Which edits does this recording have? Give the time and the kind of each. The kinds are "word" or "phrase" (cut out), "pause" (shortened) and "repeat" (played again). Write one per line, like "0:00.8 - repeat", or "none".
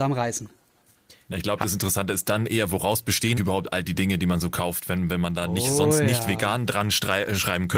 0:03.4 - word